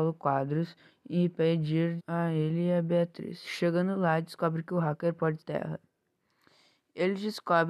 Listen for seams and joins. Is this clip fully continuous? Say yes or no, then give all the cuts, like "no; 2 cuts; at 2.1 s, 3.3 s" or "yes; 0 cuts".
no; 2 cuts; at 2.0 s, 5.4 s